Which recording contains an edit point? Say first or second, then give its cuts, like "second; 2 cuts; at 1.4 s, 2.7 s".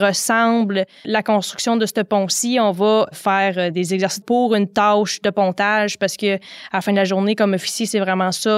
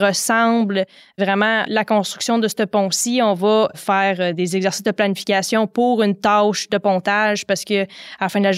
first; 2 cuts; at 1.0 s, 4.2 s